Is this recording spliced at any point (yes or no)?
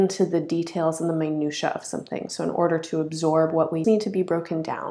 yes